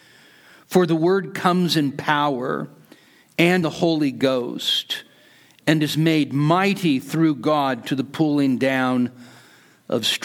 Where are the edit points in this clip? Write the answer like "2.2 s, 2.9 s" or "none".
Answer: 3.6 s

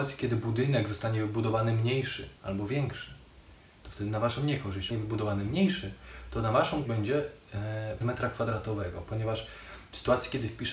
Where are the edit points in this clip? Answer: 2.4 s, 4.9 s, 6.9 s, 8.0 s

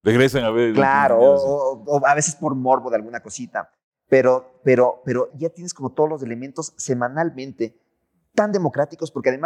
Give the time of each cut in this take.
5.3 s

